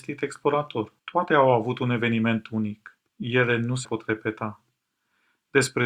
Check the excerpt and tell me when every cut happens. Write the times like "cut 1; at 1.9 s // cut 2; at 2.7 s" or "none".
cut 1; at 1.0 s // cut 2; at 3.8 s